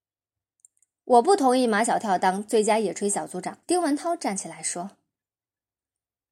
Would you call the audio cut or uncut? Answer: cut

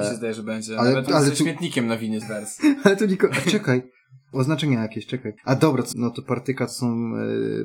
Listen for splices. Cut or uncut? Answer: cut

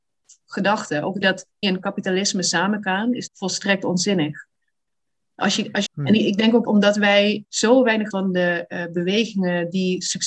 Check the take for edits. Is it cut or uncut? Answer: cut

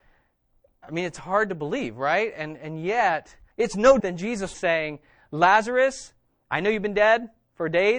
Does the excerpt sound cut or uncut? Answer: cut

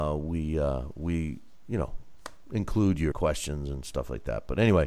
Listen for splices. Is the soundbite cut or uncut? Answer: cut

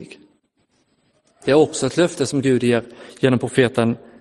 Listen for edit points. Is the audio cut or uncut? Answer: uncut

